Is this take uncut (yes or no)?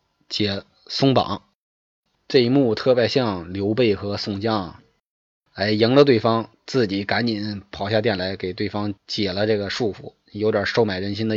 no